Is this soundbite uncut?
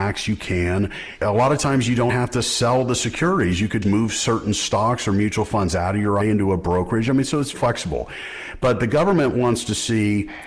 no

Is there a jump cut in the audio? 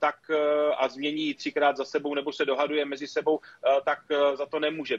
no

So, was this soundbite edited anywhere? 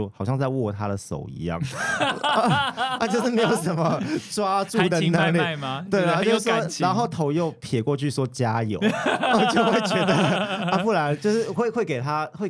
no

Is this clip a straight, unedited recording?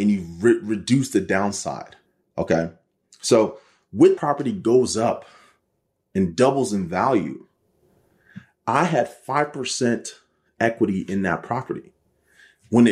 no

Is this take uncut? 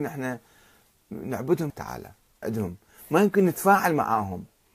no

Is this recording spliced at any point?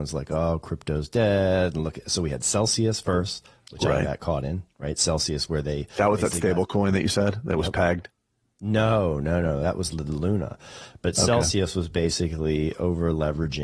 no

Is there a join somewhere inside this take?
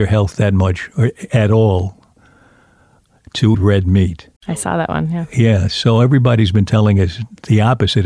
yes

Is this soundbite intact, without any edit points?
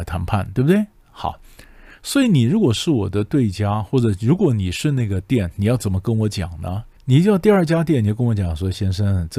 no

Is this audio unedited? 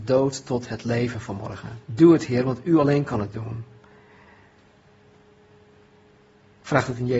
no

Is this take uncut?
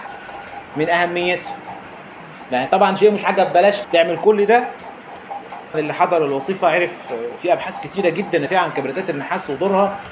no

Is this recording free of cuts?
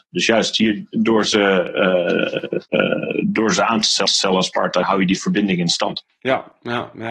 no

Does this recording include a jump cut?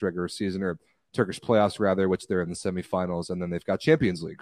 no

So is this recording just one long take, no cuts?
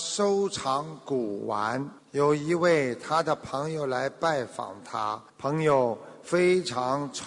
no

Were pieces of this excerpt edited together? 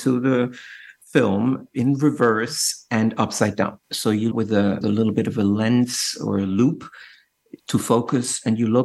yes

